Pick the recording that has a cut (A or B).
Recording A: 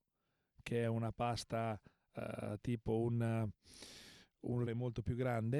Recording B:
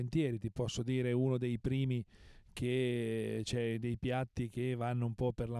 A